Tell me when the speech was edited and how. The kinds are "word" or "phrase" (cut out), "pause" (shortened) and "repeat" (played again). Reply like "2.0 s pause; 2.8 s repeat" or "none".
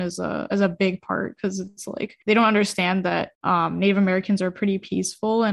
2.2 s pause; 3.3 s pause